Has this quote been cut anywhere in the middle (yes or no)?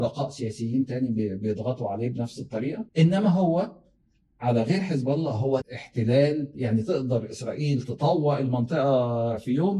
yes